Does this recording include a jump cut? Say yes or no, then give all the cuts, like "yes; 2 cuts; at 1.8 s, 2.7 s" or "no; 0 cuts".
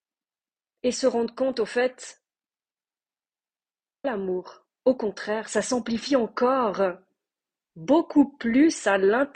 yes; 1 cut; at 4.0 s